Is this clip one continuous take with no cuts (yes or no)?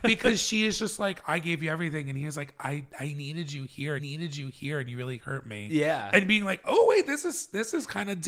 no